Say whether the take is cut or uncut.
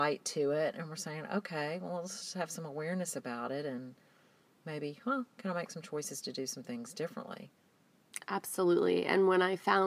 uncut